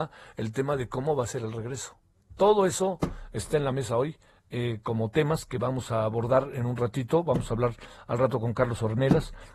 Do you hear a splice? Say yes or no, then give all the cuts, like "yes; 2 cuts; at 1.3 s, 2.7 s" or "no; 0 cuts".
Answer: no; 0 cuts